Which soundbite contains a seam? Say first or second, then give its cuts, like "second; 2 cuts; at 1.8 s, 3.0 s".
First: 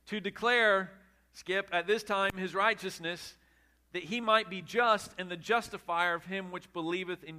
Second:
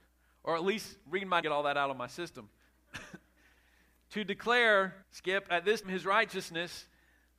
second; 3 cuts; at 1.4 s, 5.0 s, 5.8 s